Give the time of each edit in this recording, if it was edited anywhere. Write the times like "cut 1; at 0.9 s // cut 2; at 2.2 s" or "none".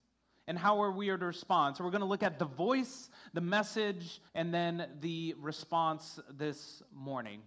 cut 1; at 4.3 s